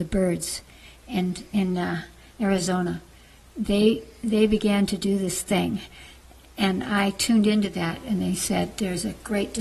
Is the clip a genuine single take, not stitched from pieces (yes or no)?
yes